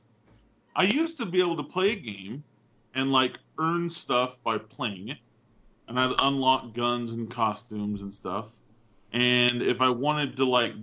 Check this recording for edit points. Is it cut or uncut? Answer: uncut